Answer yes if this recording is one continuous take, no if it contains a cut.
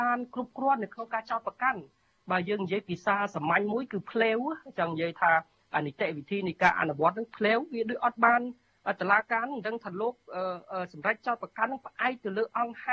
yes